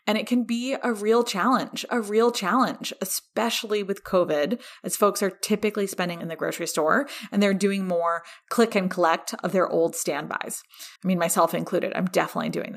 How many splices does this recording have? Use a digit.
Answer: 3